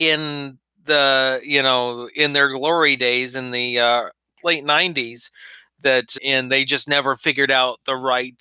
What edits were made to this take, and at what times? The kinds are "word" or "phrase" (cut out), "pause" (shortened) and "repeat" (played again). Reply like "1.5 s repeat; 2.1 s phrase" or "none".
6.2 s word